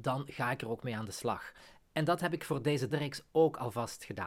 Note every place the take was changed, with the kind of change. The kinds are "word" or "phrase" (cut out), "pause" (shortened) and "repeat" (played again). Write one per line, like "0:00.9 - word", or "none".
0:02.9 - word